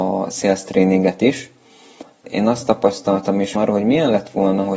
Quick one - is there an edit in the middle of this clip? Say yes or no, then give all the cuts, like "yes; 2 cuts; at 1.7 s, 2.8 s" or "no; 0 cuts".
yes; 2 cuts; at 2.2 s, 3.6 s